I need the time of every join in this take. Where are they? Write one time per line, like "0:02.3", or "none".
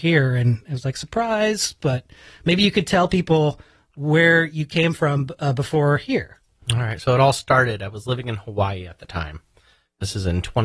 none